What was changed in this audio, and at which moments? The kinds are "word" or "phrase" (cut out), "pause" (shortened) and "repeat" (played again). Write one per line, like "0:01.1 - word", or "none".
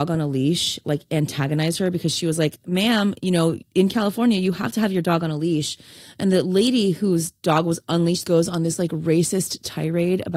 0:08.2 - word